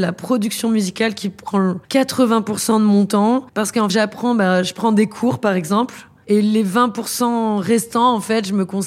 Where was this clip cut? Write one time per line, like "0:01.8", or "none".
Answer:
0:01.8
0:03.5
0:03.9

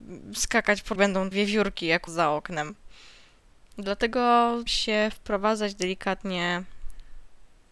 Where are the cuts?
0:01.0
0:01.3
0:02.1
0:04.7

